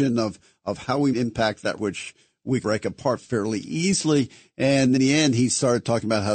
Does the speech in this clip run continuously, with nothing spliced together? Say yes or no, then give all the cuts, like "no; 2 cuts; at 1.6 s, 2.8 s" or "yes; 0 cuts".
no; 4 cuts; at 1.1 s, 1.8 s, 2.6 s, 5.0 s